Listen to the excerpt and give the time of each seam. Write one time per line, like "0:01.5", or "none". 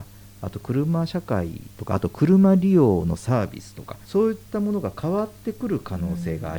0:01.7
0:04.0